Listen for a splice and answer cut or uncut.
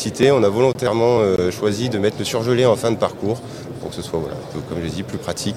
uncut